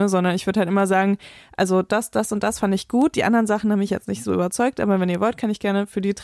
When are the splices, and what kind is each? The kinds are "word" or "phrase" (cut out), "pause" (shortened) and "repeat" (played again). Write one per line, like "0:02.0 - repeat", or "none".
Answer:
none